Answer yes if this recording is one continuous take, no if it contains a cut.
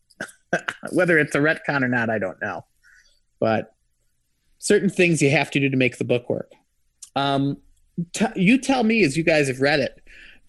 yes